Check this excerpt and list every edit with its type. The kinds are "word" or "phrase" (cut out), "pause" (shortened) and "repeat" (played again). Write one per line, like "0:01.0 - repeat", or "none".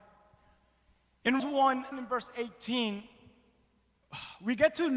0:01.4 - word
0:01.9 - word